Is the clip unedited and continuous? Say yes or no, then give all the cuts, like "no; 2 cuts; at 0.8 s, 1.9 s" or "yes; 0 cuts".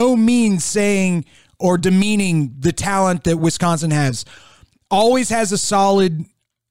yes; 0 cuts